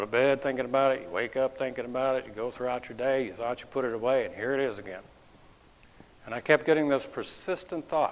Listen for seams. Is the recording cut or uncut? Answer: uncut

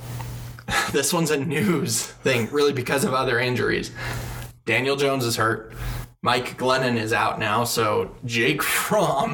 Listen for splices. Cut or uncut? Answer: uncut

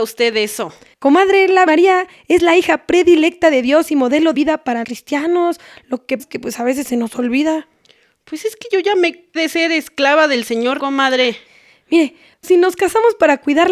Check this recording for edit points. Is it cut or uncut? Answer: cut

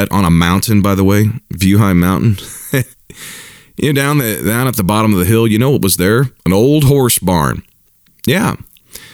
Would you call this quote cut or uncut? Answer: cut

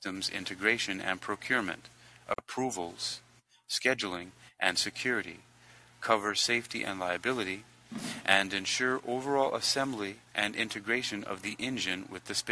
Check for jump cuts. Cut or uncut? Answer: uncut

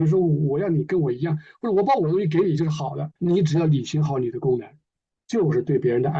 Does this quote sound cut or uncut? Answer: cut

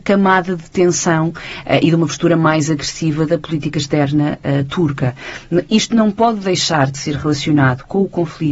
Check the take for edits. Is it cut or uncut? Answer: uncut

